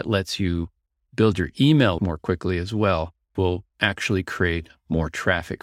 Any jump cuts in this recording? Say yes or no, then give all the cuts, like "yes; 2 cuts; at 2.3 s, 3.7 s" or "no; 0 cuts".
yes; 3 cuts; at 2.0 s, 3.4 s, 3.7 s